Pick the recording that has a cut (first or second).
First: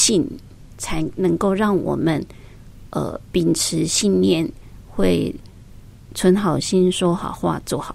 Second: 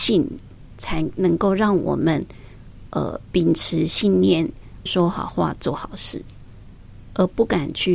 second